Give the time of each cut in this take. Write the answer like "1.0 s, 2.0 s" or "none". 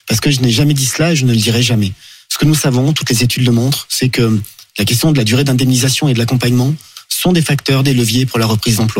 none